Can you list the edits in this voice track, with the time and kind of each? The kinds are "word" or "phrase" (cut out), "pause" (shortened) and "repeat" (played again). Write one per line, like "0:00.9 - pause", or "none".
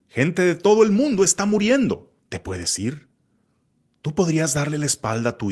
0:02.2 - pause